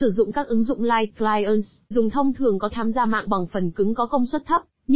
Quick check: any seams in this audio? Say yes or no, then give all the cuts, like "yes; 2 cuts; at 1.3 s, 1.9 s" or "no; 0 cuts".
yes; 3 cuts; at 1.9 s, 2.7 s, 3.3 s